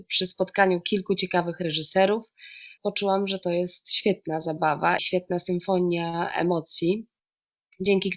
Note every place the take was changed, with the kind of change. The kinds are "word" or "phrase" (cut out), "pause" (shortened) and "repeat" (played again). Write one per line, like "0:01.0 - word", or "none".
0:02.8 - word
0:05.0 - word